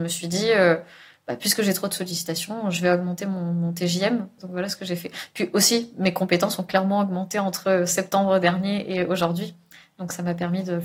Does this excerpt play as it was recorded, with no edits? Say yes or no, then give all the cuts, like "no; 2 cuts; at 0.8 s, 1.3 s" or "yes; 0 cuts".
yes; 0 cuts